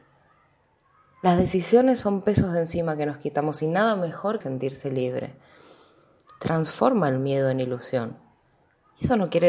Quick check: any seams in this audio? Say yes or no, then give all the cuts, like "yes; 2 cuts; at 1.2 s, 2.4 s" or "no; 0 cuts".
yes; 1 cut; at 4.4 s